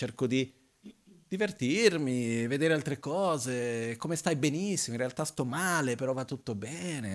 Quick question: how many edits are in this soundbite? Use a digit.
0